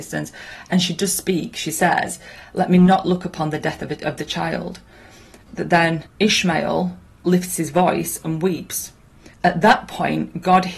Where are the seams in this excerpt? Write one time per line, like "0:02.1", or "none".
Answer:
0:05.4
0:06.1
0:09.3